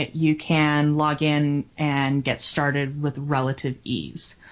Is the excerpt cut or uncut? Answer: uncut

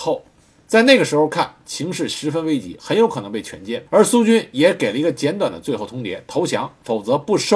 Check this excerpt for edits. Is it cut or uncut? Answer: cut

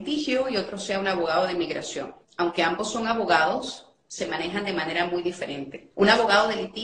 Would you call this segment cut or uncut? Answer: cut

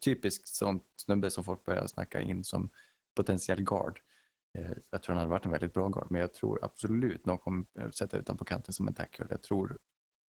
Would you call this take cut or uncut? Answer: uncut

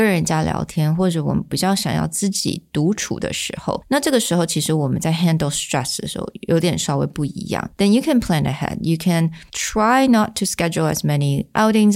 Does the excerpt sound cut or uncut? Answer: uncut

